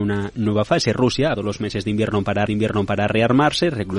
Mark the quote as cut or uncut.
cut